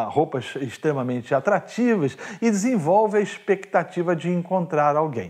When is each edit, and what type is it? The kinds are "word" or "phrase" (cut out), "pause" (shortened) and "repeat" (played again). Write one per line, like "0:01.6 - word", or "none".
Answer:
none